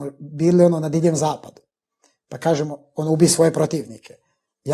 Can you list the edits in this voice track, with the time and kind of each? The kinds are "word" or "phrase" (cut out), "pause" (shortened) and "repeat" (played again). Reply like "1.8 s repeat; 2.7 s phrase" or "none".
none

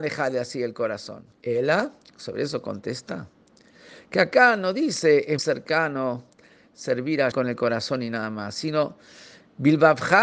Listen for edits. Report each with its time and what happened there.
1.3 s pause; 5.4 s word; 7.3 s word

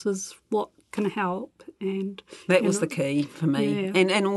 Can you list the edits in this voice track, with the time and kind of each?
2.4 s pause

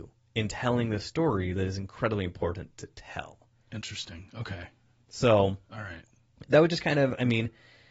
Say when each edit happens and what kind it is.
none

